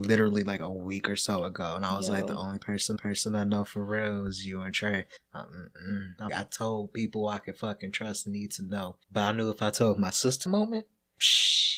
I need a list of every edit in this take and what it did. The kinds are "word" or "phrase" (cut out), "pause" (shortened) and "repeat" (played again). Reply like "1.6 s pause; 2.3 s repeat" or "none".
3.0 s repeat; 5.2 s pause; 6.3 s word; 9.0 s pause; 10.5 s phrase